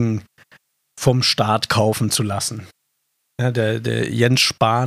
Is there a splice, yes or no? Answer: no